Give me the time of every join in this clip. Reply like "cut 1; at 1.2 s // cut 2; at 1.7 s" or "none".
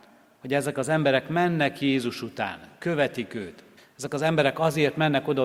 cut 1; at 3.8 s